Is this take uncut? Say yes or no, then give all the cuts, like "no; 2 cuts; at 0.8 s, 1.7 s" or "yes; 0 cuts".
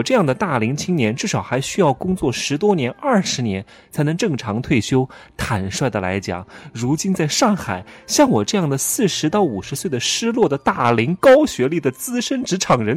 yes; 0 cuts